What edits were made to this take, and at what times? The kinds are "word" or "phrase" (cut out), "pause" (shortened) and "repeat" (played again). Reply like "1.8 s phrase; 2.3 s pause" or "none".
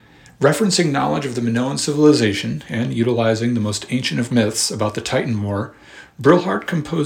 4.3 s word